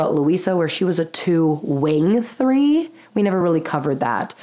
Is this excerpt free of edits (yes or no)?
yes